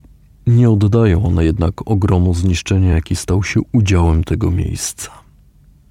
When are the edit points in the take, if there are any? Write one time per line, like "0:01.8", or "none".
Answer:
none